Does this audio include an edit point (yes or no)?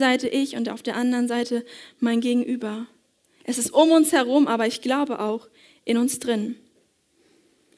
no